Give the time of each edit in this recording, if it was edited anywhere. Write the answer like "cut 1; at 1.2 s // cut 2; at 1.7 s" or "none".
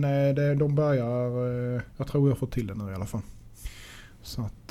cut 1; at 1.9 s

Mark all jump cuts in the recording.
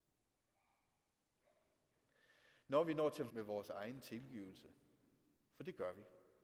cut 1; at 3.3 s

